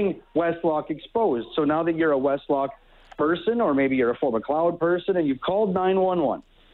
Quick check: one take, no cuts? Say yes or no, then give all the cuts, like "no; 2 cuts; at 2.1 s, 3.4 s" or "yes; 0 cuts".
yes; 0 cuts